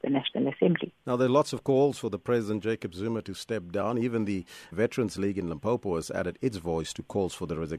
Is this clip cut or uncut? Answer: cut